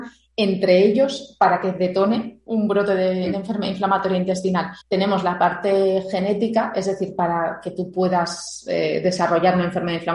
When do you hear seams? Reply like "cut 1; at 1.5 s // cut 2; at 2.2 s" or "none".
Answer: cut 1; at 4.8 s